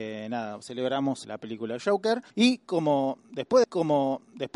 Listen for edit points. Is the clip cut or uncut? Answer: cut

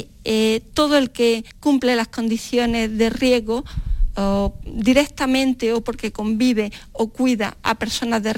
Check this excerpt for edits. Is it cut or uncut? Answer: cut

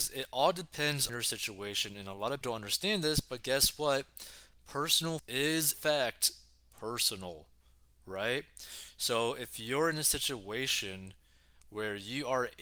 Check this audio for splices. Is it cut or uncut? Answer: cut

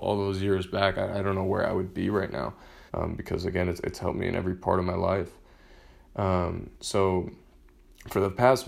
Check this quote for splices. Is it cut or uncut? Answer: cut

